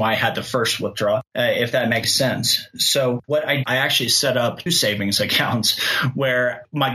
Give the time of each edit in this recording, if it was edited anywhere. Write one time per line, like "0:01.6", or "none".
0:01.3
0:02.0
0:03.2
0:03.6
0:04.7